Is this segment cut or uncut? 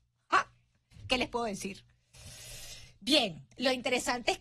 uncut